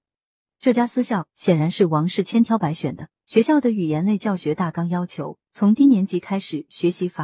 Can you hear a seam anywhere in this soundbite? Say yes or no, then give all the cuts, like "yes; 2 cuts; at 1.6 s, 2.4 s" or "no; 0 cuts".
yes; 1 cut; at 3.1 s